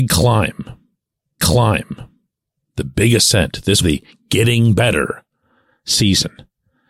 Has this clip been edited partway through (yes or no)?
yes